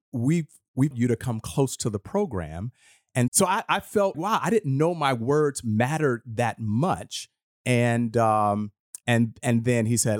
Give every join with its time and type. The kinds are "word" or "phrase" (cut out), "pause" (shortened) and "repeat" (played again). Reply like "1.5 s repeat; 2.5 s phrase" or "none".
0.9 s word; 3.3 s word; 4.1 s word